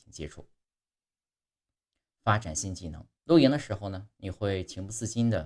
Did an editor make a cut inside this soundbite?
yes; 1 cut; at 3.2 s

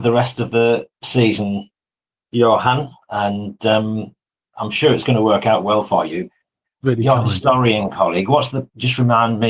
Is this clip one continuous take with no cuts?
yes; 0 cuts

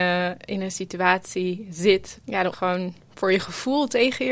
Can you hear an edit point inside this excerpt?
yes; 2 cuts; at 2.2 s, 2.5 s

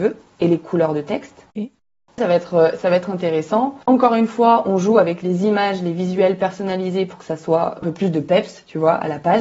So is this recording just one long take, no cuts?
no; 4 cuts; at 1.5 s, 2.2 s, 3.8 s, 7.8 s

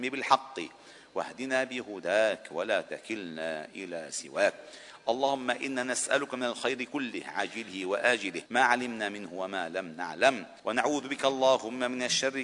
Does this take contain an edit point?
yes; 2 cuts; at 8.5 s, 10.6 s

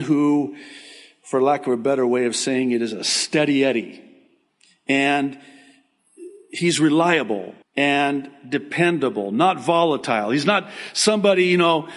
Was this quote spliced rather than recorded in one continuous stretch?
yes; 2 cuts; at 4.5 s, 7.6 s

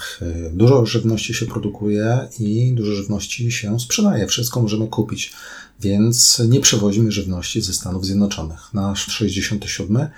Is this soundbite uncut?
no; 1 cut; at 9.1 s

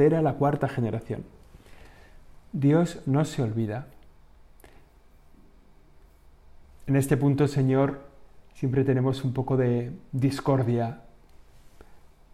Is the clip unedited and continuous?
yes; 0 cuts

